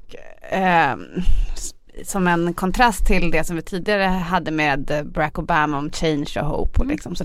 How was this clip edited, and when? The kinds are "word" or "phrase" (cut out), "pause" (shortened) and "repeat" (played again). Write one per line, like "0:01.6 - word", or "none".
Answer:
none